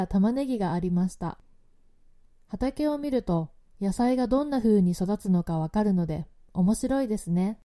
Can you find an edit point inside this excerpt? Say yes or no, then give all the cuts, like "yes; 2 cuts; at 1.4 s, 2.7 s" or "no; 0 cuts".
no; 0 cuts